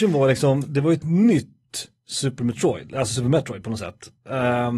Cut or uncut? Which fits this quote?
uncut